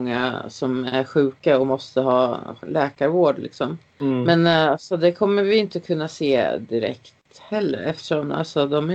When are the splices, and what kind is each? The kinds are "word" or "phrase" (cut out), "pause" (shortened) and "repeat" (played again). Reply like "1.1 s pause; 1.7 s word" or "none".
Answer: none